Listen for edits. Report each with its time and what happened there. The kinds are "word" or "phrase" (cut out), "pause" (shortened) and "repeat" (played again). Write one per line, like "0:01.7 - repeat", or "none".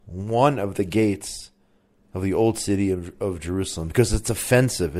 none